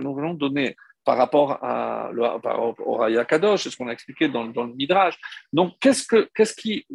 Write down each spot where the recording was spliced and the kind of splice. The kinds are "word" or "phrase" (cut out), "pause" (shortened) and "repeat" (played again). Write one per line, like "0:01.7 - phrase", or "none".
none